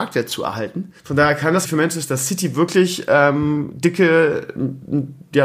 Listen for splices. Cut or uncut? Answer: cut